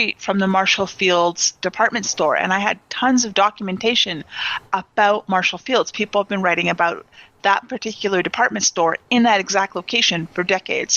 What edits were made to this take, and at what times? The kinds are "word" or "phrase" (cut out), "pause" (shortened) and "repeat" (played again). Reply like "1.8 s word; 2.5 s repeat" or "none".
none